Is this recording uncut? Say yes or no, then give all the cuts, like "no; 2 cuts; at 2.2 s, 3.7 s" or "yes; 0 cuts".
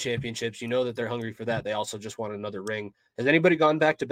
yes; 0 cuts